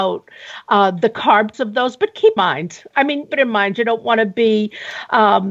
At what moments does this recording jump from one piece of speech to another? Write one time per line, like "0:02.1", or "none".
0:01.5
0:02.4
0:03.3